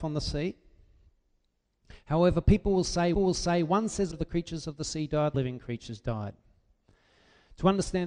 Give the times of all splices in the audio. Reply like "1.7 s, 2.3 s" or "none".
3.1 s, 4.1 s, 5.3 s